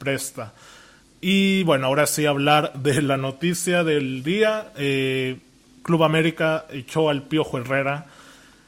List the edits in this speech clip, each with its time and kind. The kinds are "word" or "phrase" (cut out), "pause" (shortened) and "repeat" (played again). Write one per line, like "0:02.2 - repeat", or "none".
none